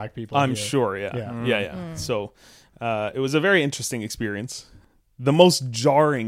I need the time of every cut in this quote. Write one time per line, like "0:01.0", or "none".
none